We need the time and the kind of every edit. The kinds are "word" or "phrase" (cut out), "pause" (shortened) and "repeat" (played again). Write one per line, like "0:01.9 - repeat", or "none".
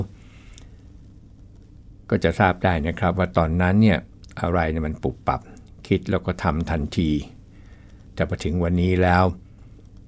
none